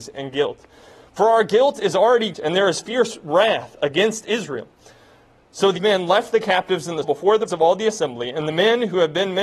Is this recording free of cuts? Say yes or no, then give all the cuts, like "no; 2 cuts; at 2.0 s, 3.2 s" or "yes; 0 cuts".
no; 4 cuts; at 2.3 s, 5.8 s, 7.0 s, 7.5 s